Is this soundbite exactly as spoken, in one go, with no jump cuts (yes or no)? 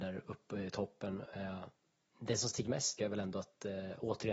no